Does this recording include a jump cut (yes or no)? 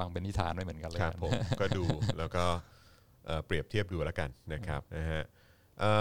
yes